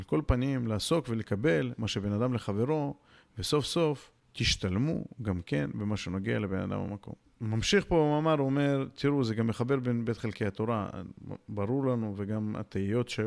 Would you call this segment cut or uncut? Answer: uncut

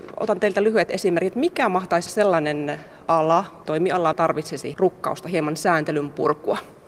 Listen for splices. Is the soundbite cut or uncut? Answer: cut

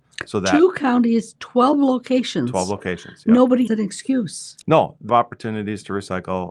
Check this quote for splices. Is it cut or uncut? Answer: cut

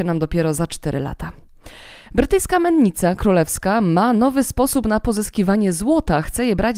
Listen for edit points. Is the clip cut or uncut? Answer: uncut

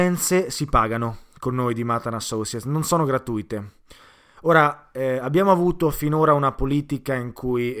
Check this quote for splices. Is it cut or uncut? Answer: uncut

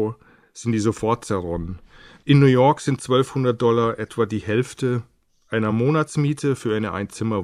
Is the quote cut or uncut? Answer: uncut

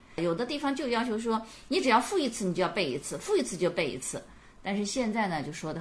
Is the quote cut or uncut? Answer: uncut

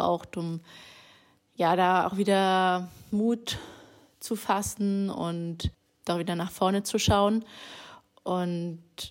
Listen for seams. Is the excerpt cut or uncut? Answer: uncut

